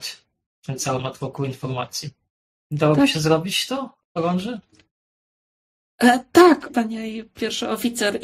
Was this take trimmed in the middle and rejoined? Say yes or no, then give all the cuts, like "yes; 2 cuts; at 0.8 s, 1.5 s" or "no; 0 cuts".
yes; 3 cuts; at 2.4 s, 4.0 s, 6.7 s